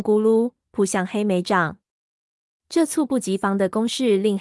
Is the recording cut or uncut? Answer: uncut